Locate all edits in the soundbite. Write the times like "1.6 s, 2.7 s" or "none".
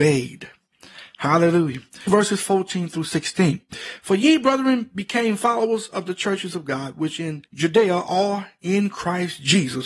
7.5 s